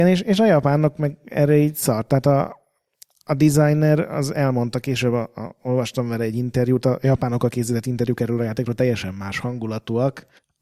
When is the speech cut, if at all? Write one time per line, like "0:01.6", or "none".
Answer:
none